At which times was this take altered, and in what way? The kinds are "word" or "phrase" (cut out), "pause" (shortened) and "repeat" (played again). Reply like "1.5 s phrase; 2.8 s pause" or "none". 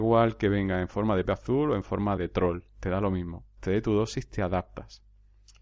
1.3 s word; 2.2 s word; 3.6 s word